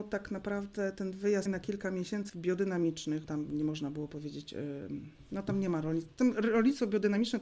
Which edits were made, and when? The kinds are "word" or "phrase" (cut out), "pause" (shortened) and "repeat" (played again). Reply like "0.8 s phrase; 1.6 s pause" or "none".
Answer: 1.5 s word; 2.3 s phrase; 3.2 s word